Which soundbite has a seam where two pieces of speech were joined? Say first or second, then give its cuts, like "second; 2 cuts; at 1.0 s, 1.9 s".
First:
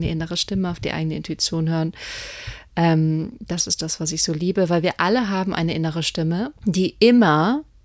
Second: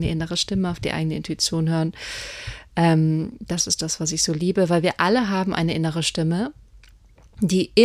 first; 1 cut; at 6.6 s